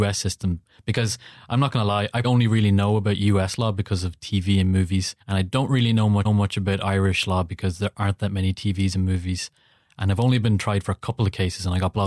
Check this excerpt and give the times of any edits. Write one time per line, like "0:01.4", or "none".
0:02.2
0:05.2
0:06.2

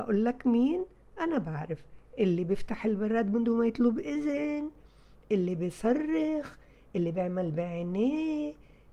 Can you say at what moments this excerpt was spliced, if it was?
none

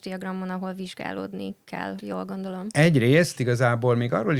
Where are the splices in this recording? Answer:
0:02.0
0:03.3

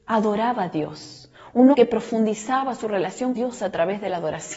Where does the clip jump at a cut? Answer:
0:01.7
0:03.4

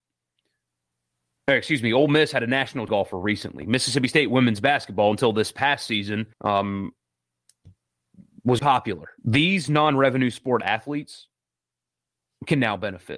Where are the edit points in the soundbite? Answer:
0:02.9
0:06.3
0:08.6
0:09.2

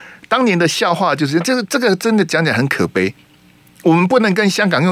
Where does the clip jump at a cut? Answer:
none

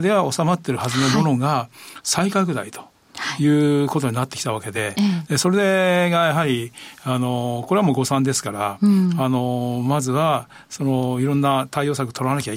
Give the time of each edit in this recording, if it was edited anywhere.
none

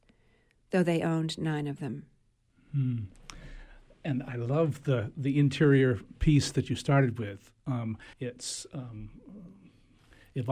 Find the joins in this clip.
0:02.5
0:08.1

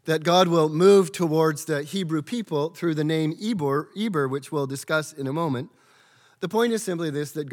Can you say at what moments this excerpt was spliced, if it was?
none

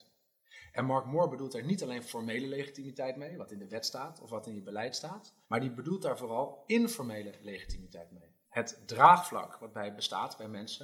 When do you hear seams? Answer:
0:05.4
0:08.4

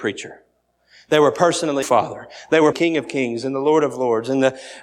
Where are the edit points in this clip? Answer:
0:01.8
0:02.7

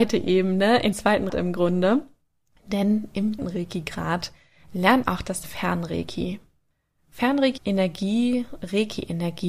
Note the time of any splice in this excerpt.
0:00.9
0:01.3
0:03.4
0:05.0
0:05.4
0:07.6

